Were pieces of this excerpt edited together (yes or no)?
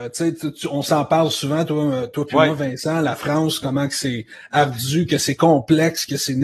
no